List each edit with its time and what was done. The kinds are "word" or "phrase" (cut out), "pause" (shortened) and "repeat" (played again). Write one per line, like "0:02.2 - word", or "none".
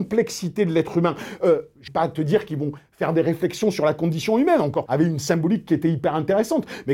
0:01.9 - word
0:04.9 - phrase